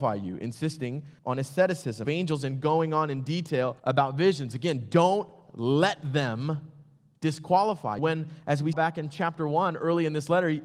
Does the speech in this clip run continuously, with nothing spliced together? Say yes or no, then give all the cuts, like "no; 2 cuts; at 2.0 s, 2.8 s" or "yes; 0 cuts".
no; 5 cuts; at 1.2 s, 2.0 s, 3.8 s, 8.0 s, 8.7 s